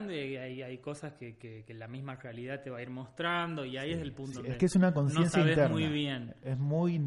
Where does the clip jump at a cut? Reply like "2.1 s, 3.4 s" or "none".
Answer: 4.3 s